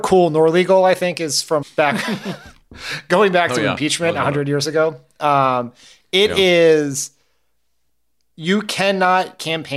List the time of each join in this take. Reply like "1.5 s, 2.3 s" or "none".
1.6 s